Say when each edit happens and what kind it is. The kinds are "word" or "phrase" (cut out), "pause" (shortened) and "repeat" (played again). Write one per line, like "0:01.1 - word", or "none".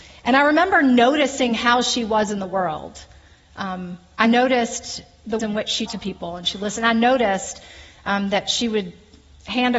0:05.4 - word
0:05.9 - word